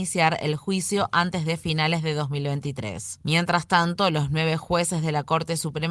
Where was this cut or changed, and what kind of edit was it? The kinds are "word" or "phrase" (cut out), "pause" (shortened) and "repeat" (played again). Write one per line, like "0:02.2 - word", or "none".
none